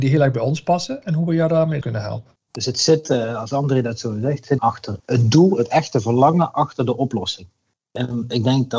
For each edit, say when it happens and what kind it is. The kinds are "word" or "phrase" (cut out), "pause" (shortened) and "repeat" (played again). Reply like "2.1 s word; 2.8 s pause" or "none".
1.8 s word; 2.3 s pause; 4.6 s word; 5.0 s word

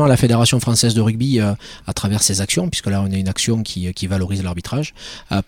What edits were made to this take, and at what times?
none

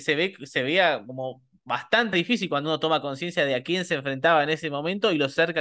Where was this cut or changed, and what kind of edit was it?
2.1 s word

